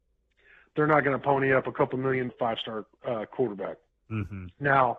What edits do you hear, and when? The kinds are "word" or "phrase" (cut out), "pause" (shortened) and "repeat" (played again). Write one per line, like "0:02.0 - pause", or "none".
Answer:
0:02.3 - phrase